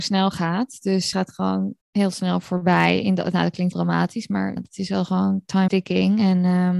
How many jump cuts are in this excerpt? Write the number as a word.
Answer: five